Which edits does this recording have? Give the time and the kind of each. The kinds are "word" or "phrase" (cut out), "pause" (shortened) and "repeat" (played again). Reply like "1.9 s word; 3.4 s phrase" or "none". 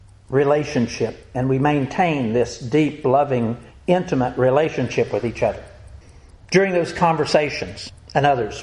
none

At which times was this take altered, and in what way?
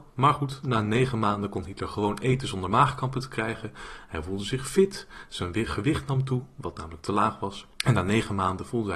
7.7 s pause

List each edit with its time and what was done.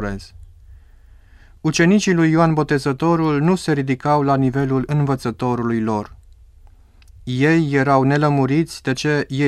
none

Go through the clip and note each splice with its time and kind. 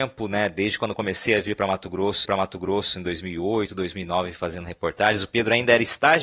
2.3 s repeat

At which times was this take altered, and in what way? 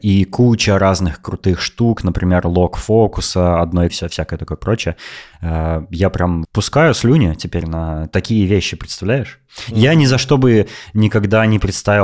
3.9 s phrase; 6.4 s word

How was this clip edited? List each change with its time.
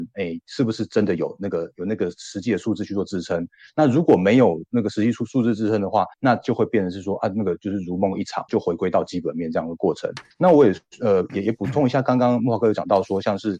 6.1 s pause; 8.5 s phrase; 10.3 s pause

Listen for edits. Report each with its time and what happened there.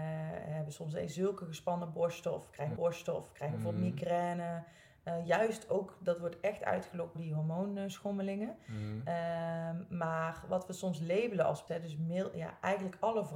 2.8 s repeat; 7.1 s word; 11.7 s word

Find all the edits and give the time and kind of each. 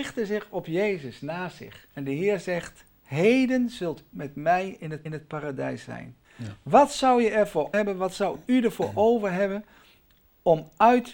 1.9 s pause; 4.1 s word; 5.1 s repeat; 6.2 s pause; 7.7 s word

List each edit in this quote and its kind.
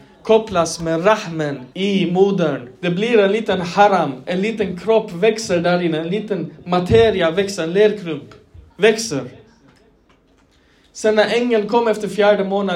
1.7 s pause; 2.7 s pause; 8.7 s pause

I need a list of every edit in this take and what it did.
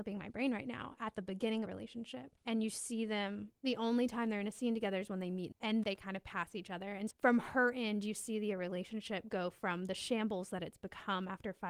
1.7 s phrase; 2.4 s pause; 3.6 s pause; 5.5 s phrase; 5.8 s word; 7.1 s word

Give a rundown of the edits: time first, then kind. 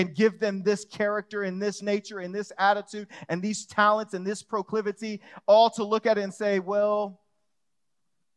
none

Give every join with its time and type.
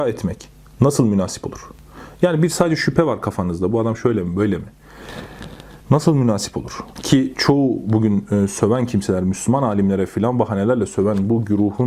5.8 s pause

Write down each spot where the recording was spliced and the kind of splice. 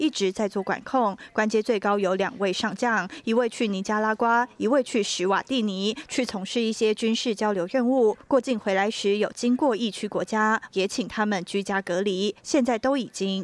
10.7 s phrase

